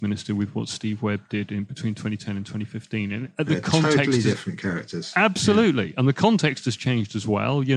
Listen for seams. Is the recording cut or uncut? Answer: uncut